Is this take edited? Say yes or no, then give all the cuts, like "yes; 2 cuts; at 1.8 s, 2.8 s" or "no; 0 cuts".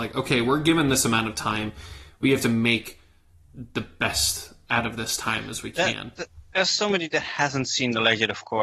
yes; 1 cut; at 6.5 s